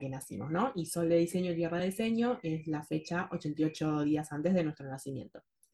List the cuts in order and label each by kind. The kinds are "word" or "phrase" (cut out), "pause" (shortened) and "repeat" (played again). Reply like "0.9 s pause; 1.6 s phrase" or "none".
none